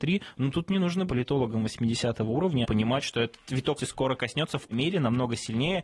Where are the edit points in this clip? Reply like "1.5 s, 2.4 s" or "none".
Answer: 1.1 s, 2.6 s, 3.8 s, 4.7 s